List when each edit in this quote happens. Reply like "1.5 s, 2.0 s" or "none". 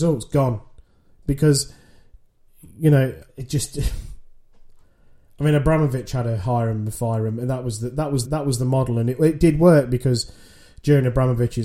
3.3 s, 8.2 s